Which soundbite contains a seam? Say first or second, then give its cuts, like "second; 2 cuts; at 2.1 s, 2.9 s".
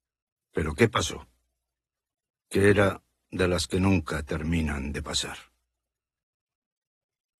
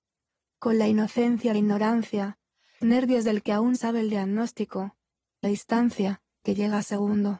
second; 5 cuts; at 1.5 s, 2.8 s, 3.7 s, 5.4 s, 6.4 s